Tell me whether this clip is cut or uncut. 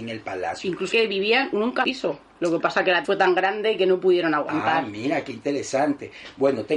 cut